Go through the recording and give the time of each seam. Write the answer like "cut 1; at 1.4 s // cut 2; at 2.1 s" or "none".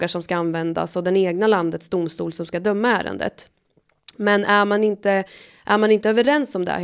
none

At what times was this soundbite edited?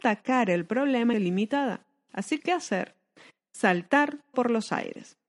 cut 1; at 1.1 s // cut 2; at 2.4 s // cut 3; at 4.3 s

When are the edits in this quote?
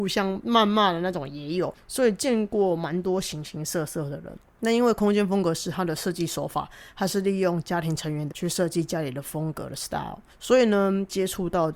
cut 1; at 8.3 s

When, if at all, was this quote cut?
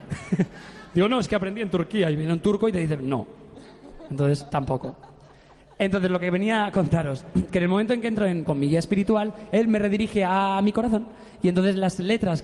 cut 1; at 8.4 s

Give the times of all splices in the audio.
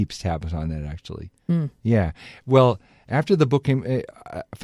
none

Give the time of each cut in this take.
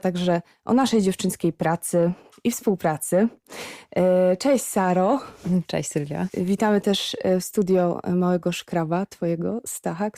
none

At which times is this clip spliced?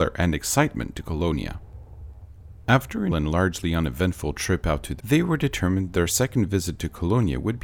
cut 1; at 3.1 s // cut 2; at 5.0 s

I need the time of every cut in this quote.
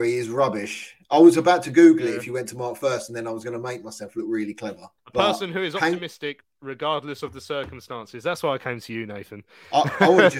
cut 1; at 5.0 s

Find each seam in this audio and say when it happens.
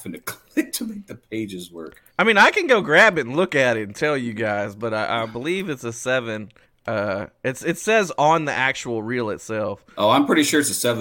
cut 1; at 2.1 s // cut 2; at 6.6 s

